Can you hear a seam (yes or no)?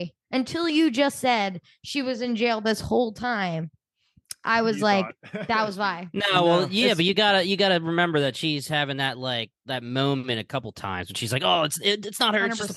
no